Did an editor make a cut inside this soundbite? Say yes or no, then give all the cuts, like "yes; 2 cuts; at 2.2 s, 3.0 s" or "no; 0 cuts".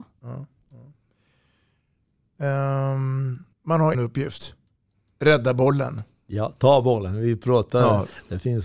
yes; 2 cuts; at 3.5 s, 3.9 s